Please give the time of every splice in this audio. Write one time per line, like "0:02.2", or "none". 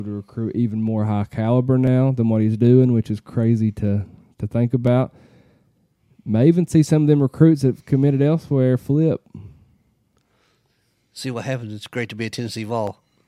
none